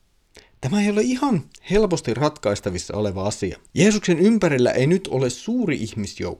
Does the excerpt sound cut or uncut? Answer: cut